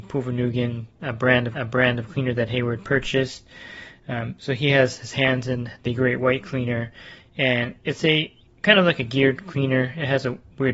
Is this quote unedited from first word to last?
no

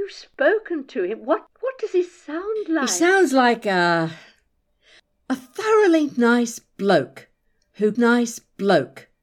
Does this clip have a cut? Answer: yes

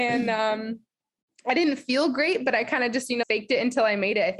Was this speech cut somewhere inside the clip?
yes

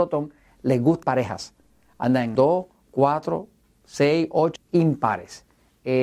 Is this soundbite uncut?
no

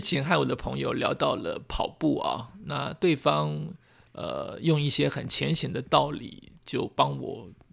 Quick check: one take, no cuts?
yes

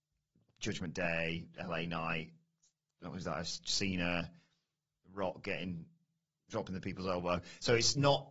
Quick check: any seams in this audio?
no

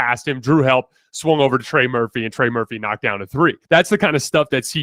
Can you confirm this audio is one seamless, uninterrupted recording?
no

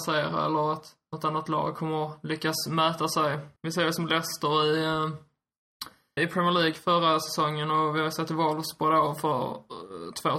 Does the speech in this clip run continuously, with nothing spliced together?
no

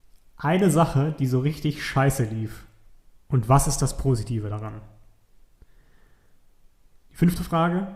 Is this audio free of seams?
no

